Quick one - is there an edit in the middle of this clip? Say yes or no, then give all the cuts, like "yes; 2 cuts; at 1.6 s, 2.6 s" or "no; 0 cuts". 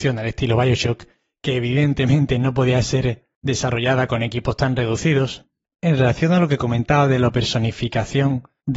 no; 0 cuts